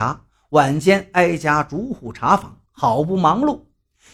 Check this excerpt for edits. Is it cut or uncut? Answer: cut